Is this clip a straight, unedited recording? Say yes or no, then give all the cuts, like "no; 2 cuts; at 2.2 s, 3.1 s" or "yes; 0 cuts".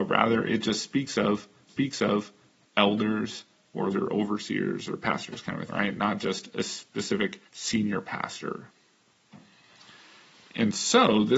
no; 4 cuts; at 1.7 s, 3.9 s, 5.7 s, 7.5 s